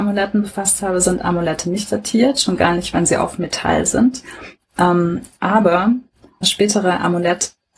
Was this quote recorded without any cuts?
yes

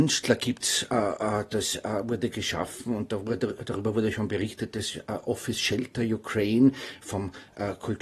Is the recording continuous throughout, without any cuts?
yes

